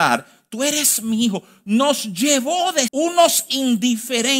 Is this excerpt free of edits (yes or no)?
no